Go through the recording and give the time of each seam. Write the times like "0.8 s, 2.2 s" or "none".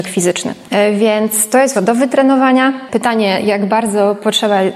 1.7 s